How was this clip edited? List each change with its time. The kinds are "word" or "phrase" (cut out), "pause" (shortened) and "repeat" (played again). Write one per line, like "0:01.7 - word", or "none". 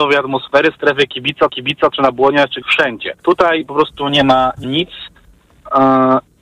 0:01.5 - repeat
0:02.6 - word
0:03.2 - pause
0:04.6 - word